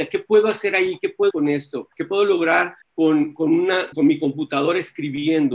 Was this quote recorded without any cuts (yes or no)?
no